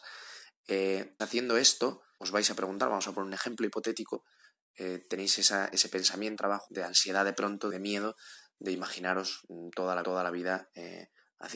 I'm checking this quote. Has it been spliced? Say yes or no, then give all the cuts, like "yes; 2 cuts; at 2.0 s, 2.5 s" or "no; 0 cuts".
yes; 6 cuts; at 1.2 s, 2.2 s, 6.4 s, 6.7 s, 7.7 s, 10.0 s